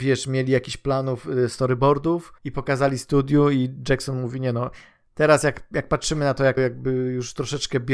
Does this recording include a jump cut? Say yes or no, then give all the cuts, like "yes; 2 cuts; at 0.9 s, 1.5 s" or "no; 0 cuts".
yes; 2 cuts; at 2.4 s, 6.6 s